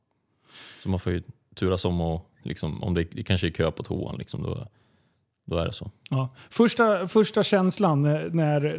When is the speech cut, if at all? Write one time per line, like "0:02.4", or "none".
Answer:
none